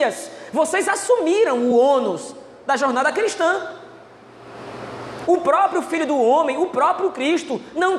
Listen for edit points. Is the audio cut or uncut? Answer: uncut